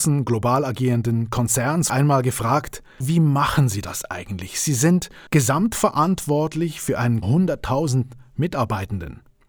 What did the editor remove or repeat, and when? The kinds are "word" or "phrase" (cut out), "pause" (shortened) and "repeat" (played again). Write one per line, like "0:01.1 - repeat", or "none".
0:01.9 - word
0:03.0 - phrase
0:05.3 - pause
0:07.2 - phrase